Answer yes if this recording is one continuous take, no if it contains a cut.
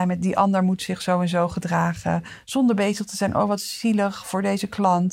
yes